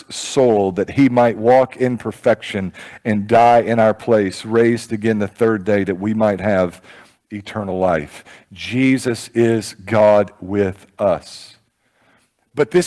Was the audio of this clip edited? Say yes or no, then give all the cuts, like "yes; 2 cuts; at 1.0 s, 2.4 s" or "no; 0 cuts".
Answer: no; 0 cuts